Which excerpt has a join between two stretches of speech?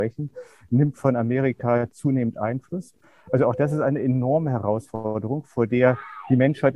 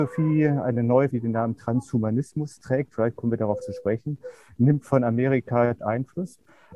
second; 3 cuts; at 1.1 s, 3.6 s, 5.8 s

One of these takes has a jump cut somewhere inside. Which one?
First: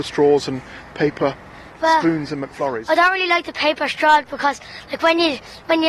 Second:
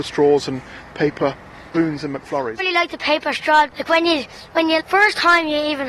second; 4 cuts; at 1.7 s, 2.6 s, 3.7 s, 4.8 s

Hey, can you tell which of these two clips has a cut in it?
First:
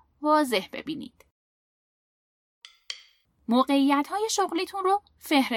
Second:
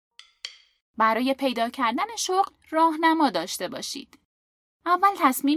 second; 1 cut; at 2.6 s

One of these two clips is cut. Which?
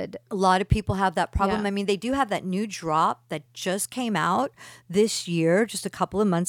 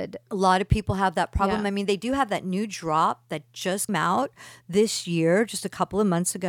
second; 1 cut; at 3.9 s

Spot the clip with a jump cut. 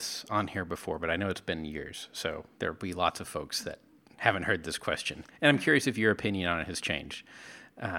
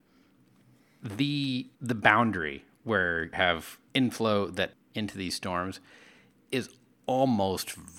second; 4 cuts; at 1.7 s, 3.3 s, 3.9 s, 4.7 s

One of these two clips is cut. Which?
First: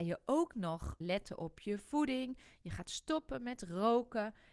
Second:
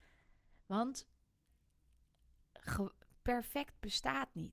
first; 1 cut; at 1.0 s

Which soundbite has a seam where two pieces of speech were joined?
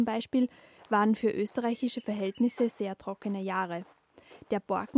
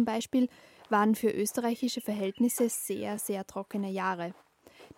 first; 1 cut; at 2.7 s

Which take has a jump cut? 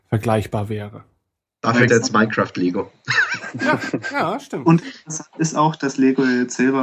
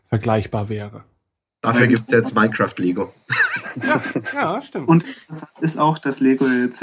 first; 1 cut; at 1.9 s

